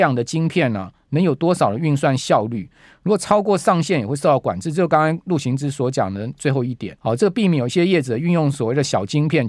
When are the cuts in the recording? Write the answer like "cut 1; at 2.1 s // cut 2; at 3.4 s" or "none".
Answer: cut 1; at 7.0 s